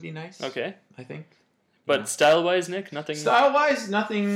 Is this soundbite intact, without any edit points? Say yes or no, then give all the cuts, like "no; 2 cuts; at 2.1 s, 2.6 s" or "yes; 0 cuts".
yes; 0 cuts